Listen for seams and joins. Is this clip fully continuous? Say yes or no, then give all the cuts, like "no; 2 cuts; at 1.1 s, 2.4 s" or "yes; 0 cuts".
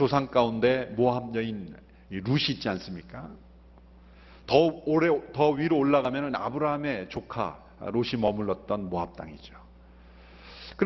yes; 0 cuts